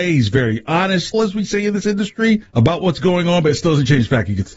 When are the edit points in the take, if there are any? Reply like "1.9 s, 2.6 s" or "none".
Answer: 1.1 s, 2.5 s